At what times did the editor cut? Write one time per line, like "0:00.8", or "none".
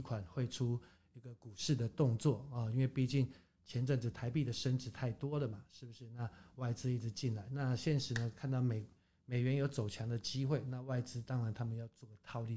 none